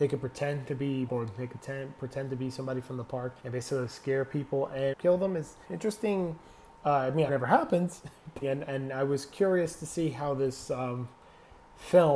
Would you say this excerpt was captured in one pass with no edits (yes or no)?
no